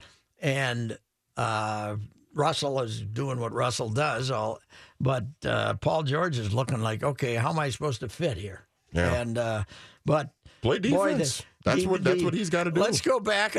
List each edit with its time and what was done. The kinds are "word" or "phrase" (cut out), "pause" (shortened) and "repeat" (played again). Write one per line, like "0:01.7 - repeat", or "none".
none